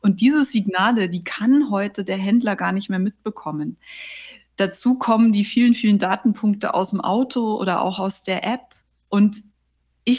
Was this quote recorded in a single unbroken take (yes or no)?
yes